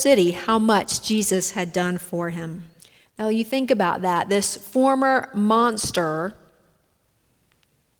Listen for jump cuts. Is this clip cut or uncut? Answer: cut